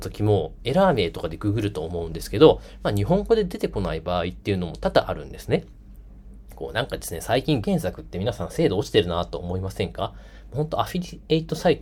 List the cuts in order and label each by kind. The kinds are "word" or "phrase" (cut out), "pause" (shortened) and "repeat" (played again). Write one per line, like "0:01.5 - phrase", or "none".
0:07.6 - word